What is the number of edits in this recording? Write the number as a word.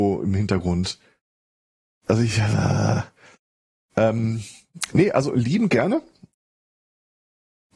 zero